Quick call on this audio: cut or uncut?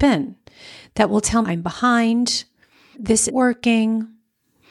cut